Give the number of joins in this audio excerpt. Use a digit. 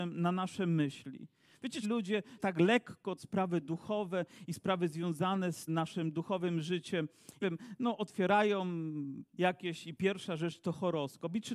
6